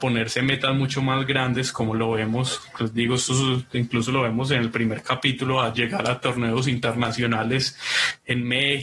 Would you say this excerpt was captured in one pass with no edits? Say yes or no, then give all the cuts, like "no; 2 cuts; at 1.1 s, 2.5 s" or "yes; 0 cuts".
yes; 0 cuts